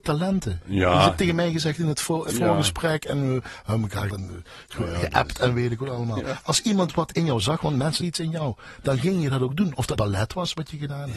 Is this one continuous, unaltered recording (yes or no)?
no